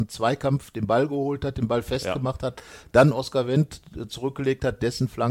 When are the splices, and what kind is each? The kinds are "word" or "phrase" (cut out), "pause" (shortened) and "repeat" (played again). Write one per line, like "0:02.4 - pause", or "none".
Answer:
none